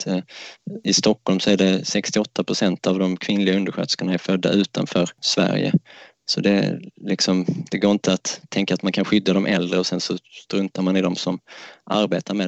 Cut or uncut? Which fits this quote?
uncut